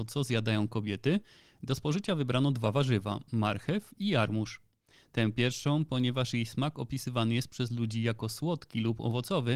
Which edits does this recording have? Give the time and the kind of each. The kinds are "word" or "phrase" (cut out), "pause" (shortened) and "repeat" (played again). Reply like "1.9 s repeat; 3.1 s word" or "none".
none